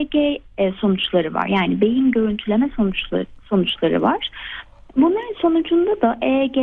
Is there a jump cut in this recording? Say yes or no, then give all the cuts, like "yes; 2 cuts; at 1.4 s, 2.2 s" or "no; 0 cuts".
no; 0 cuts